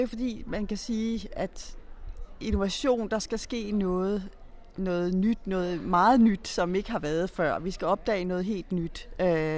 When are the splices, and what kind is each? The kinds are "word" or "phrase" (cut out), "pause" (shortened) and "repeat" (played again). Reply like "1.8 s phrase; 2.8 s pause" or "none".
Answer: none